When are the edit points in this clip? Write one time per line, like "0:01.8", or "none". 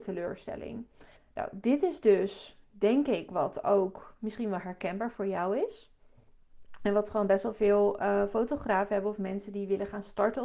0:01.2